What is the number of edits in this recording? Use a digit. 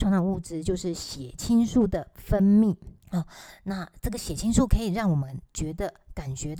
1